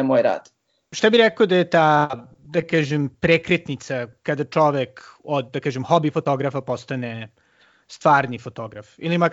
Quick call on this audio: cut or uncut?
uncut